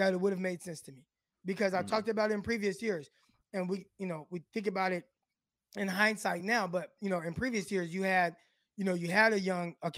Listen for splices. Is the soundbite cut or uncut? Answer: uncut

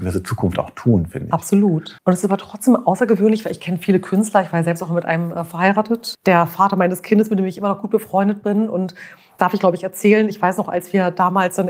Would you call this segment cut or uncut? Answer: cut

